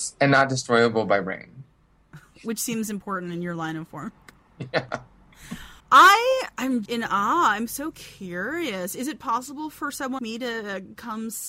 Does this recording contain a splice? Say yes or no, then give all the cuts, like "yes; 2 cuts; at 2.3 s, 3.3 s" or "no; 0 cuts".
yes; 3 cuts; at 5.8 s, 6.9 s, 10.2 s